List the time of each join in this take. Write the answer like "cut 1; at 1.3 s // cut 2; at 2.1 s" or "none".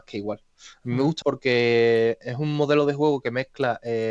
cut 1; at 1.2 s